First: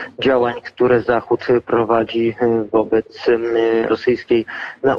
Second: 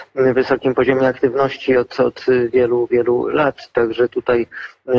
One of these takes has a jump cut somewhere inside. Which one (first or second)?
first